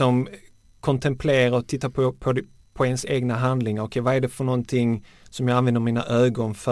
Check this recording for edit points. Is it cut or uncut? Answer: uncut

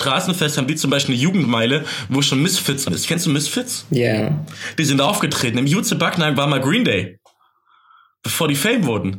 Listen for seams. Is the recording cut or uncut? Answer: cut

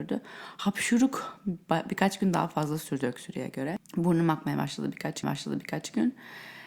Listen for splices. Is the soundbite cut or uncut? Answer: cut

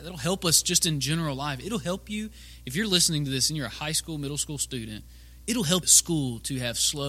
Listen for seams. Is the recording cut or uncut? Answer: cut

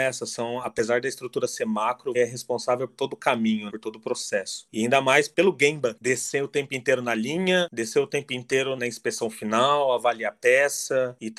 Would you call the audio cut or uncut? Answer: cut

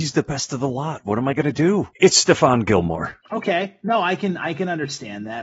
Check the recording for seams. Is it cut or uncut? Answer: uncut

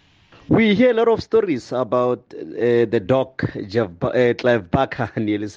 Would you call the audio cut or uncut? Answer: uncut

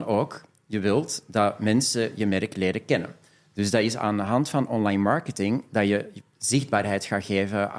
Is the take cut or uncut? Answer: uncut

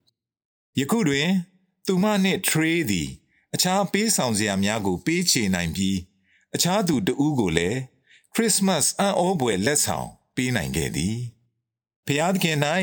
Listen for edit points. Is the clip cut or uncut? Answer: uncut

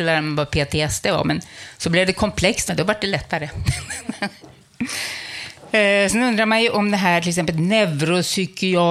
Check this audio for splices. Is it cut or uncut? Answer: cut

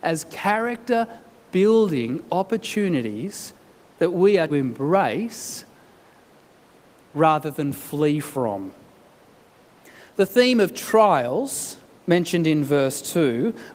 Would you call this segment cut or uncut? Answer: cut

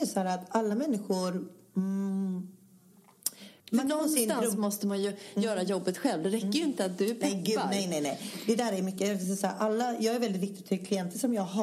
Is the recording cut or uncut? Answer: cut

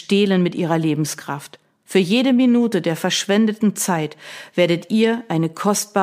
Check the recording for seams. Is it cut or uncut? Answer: uncut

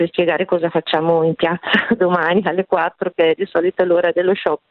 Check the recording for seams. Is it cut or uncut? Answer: uncut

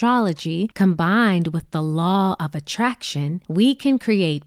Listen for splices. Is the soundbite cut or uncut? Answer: uncut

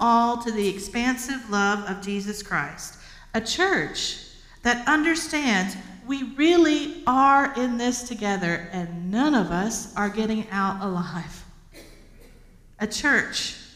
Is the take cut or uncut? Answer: uncut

